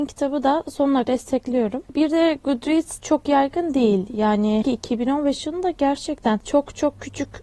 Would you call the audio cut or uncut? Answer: cut